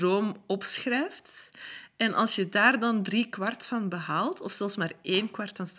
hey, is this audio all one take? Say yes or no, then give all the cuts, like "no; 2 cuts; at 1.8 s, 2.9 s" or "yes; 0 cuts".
yes; 0 cuts